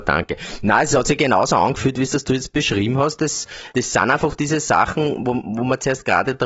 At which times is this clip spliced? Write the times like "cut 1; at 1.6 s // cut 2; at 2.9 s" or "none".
cut 1; at 3.7 s

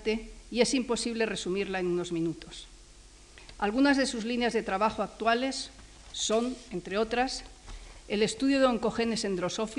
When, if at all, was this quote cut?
none

